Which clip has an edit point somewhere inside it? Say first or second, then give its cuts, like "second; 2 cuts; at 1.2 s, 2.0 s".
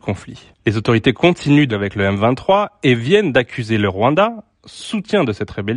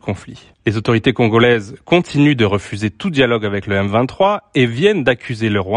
first; 2 cuts; at 1.1 s, 1.7 s